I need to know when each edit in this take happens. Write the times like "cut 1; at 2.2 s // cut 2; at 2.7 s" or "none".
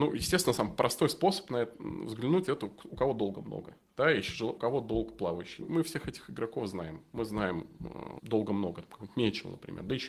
cut 1; at 4.6 s // cut 2; at 5.6 s // cut 3; at 8.2 s